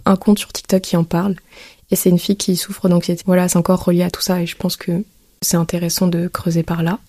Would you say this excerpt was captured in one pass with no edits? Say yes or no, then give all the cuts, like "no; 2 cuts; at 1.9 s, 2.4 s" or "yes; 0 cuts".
no; 1 cut; at 3.2 s